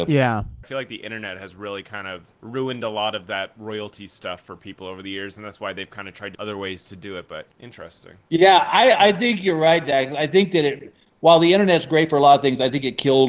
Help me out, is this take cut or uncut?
cut